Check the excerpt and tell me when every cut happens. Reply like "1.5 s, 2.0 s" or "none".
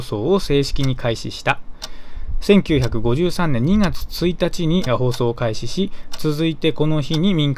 4.9 s